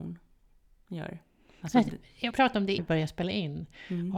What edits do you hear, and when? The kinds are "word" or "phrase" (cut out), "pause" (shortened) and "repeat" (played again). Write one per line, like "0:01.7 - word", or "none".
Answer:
0:02.3 - word
0:02.8 - word